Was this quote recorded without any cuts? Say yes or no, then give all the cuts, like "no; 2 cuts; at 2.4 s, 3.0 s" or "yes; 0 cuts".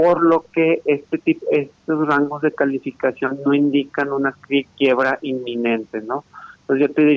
yes; 0 cuts